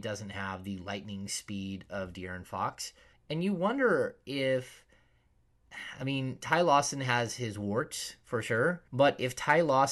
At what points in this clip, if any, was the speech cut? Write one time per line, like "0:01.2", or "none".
0:03.1
0:08.9